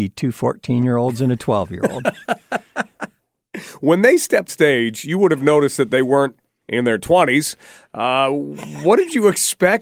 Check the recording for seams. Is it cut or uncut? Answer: cut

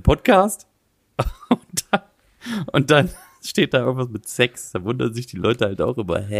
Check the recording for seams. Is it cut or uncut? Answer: uncut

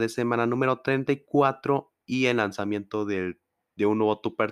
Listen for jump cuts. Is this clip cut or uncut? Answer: uncut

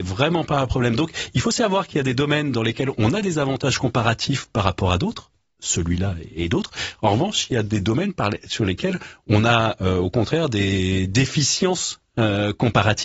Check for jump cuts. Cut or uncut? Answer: uncut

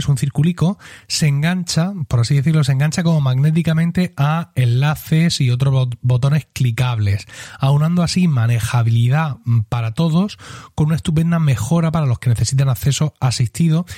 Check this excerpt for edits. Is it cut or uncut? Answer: uncut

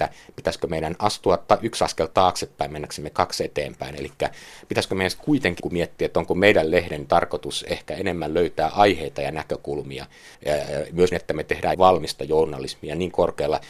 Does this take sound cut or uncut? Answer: cut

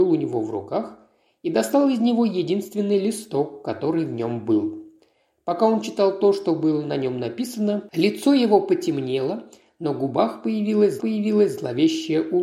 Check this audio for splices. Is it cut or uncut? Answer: cut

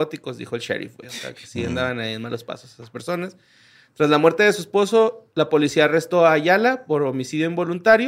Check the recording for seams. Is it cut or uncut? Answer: uncut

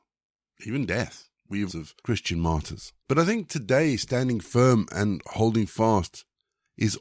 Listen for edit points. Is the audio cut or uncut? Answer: cut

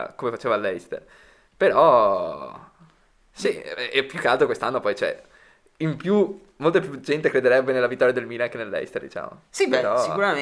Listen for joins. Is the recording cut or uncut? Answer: uncut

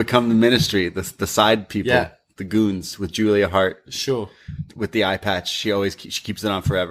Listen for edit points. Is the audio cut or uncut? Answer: uncut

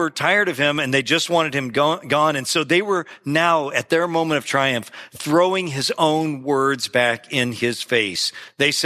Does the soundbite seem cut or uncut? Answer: uncut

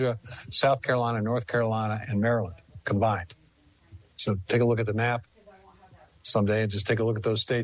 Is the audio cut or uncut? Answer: uncut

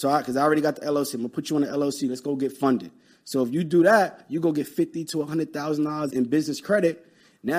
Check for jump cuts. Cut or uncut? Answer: cut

